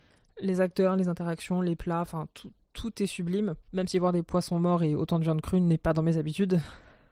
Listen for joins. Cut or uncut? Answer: cut